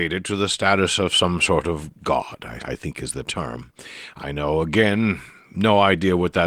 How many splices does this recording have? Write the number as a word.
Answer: three